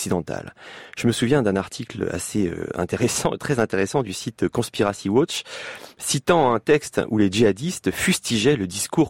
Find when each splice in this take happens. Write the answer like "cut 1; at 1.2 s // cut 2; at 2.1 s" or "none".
none